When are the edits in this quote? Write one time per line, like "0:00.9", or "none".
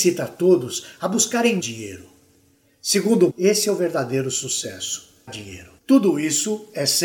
0:01.6
0:03.3
0:05.3
0:05.8